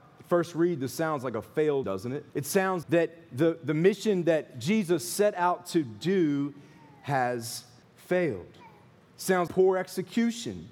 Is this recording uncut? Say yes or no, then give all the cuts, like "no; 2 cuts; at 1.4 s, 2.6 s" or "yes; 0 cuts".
no; 5 cuts; at 1.8 s, 2.3 s, 2.8 s, 7.8 s, 9.5 s